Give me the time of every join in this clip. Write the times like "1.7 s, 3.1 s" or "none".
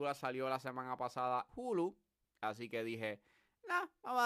1.5 s